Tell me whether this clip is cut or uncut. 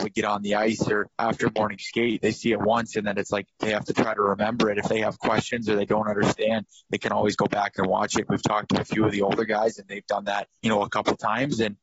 cut